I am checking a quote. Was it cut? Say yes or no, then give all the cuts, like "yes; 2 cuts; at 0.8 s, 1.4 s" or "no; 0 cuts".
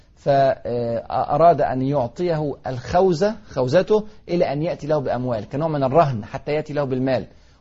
no; 0 cuts